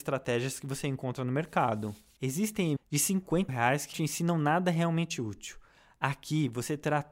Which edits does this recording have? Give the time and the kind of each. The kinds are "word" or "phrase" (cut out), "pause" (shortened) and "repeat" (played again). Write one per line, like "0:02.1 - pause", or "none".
0:02.8 - word
0:03.5 - word
0:03.9 - word